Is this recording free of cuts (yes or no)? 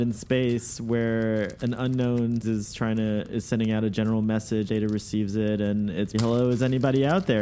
no